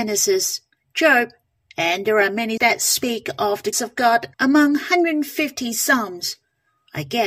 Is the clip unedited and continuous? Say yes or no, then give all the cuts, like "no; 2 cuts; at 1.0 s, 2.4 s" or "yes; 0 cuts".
no; 3 cuts; at 2.6 s, 3.7 s, 4.3 s